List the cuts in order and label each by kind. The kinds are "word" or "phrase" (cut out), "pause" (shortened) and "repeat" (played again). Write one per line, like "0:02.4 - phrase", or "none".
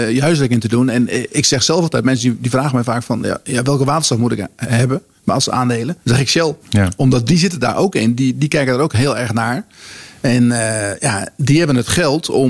0:06.0 - pause
0:06.6 - pause